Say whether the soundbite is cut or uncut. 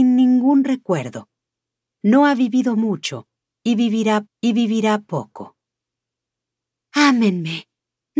cut